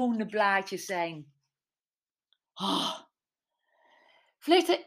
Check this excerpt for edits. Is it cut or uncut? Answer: uncut